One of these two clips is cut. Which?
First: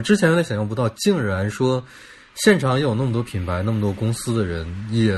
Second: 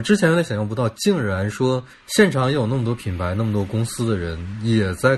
second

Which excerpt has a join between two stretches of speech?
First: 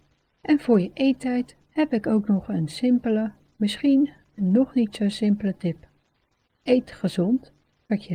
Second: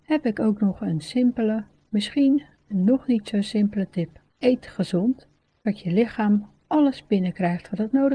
second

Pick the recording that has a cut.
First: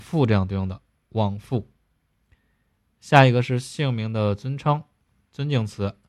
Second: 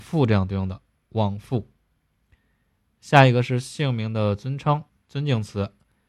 second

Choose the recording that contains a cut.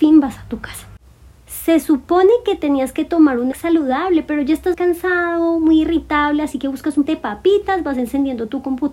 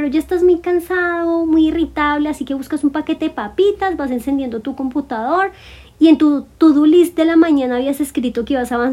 first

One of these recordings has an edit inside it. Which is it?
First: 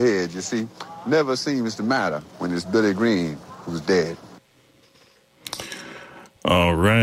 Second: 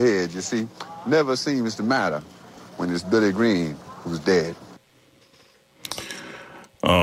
first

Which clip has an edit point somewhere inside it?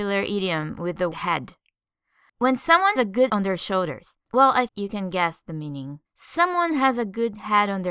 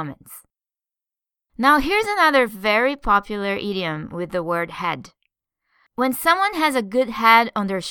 first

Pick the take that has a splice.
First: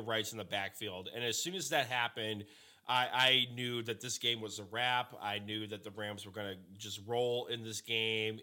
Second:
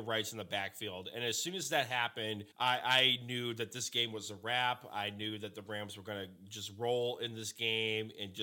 second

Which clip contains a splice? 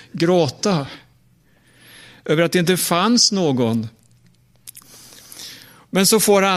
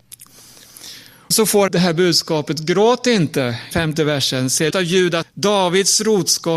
second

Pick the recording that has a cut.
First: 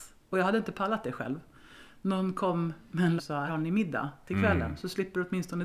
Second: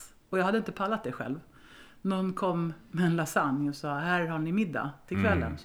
first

